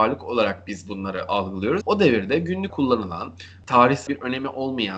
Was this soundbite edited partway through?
yes; 3 cuts; at 1.8 s, 2.7 s, 4.1 s

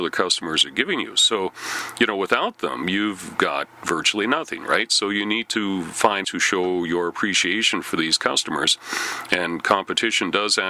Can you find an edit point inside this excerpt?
yes; 1 cut; at 6.2 s

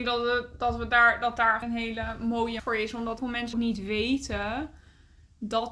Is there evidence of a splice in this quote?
yes; 4 cuts; at 1.6 s, 2.6 s, 3.2 s, 3.5 s

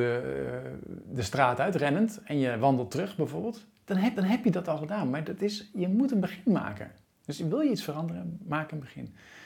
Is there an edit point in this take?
yes; 2 cuts; at 4.2 s, 7.0 s

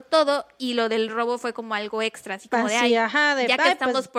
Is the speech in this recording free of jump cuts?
yes; 0 cuts

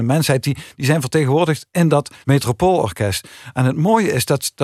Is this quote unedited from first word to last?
no; 1 cut; at 2.2 s

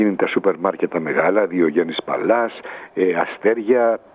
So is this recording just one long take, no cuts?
yes; 0 cuts

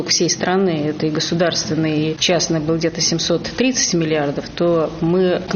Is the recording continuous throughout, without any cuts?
yes; 0 cuts

